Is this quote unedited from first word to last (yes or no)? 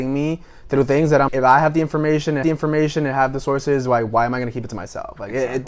no